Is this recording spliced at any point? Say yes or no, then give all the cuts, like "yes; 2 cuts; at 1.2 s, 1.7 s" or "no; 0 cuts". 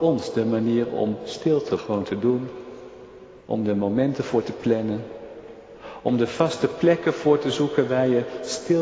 yes; 2 cuts; at 1.8 s, 3.4 s